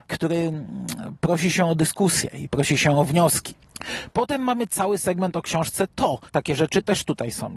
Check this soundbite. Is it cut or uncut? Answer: cut